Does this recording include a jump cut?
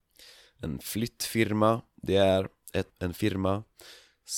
yes; 1 cut; at 2.9 s

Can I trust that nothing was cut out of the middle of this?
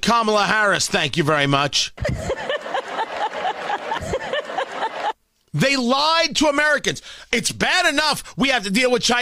yes; 0 cuts

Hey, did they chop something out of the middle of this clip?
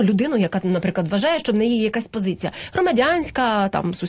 no; 0 cuts

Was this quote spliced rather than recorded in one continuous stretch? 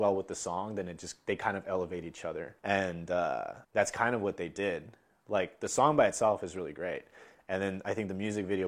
yes; 2 cuts; at 2.6 s, 3.6 s

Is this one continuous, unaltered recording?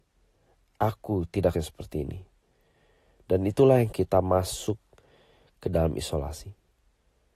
no; 2 cuts; at 1.5 s, 3.9 s

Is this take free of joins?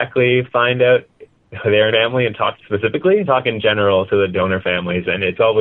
no; 3 cuts; at 1.9 s, 2.6 s, 3.3 s

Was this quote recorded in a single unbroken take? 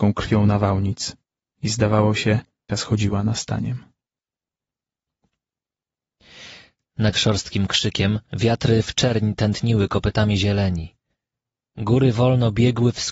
no; 4 cuts; at 1.2 s, 2.7 s, 7.1 s, 8.2 s

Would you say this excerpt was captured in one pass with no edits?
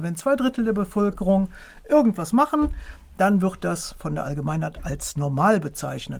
yes; 0 cuts

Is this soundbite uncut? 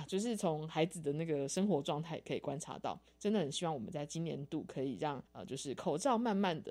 no; 1 cut; at 5.3 s

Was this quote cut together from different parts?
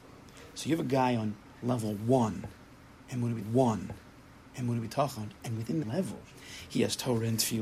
yes; 2 cuts; at 3.4 s, 5.8 s

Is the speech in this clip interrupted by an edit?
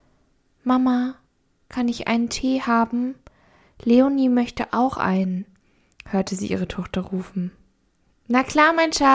no; 0 cuts

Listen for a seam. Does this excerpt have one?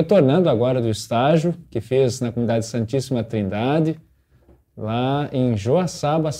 no; 0 cuts

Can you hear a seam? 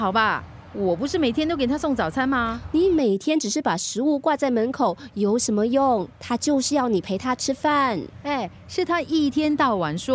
no; 0 cuts

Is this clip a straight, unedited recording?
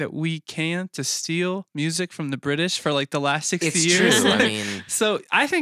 yes; 0 cuts

